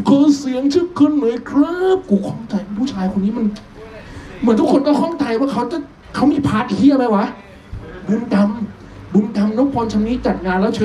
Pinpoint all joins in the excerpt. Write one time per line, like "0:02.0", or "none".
0:06.0

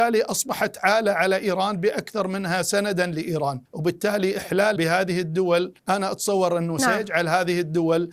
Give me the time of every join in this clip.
0:03.7
0:04.8
0:05.8

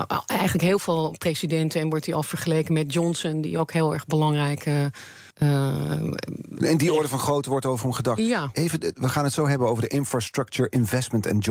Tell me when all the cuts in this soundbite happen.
0:05.3

